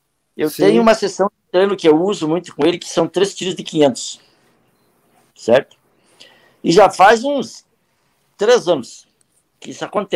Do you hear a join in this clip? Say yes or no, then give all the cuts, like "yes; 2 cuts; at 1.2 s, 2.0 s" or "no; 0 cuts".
no; 0 cuts